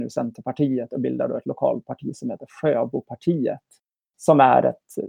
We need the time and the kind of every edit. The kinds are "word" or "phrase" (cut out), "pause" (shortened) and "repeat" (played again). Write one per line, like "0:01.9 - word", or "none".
none